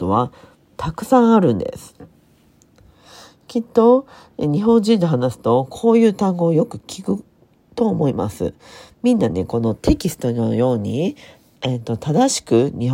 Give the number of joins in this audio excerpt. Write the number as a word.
zero